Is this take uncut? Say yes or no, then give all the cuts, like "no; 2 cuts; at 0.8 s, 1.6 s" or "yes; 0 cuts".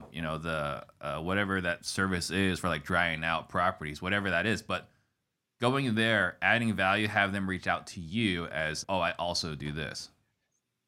no; 1 cut; at 8.8 s